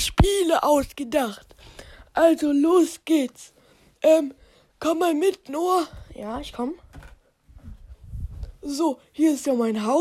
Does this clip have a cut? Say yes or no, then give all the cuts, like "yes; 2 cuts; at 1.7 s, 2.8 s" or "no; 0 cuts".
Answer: no; 0 cuts